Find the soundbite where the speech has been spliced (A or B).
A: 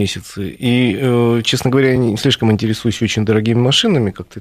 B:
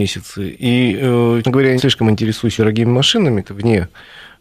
B